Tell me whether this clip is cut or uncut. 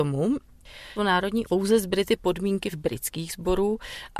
cut